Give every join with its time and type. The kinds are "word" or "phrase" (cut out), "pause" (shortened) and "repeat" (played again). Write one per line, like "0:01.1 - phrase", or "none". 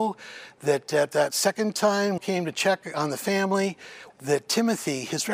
0:02.2 - phrase
0:04.1 - phrase